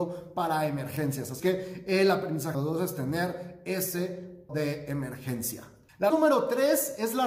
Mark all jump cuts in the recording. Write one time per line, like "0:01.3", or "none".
0:01.4
0:02.5
0:04.5
0:06.1